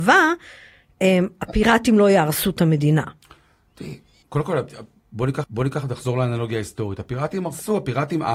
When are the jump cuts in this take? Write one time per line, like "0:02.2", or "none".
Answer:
0:04.2
0:05.4